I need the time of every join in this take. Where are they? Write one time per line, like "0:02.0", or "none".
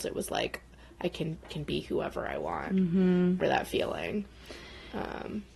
0:01.4
0:03.4